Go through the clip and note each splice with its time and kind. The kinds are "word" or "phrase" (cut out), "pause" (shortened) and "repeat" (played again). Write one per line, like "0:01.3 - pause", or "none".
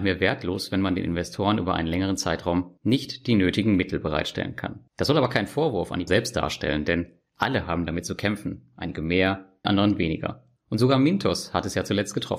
0:04.9 - pause
0:06.1 - word
0:09.6 - word
0:10.6 - pause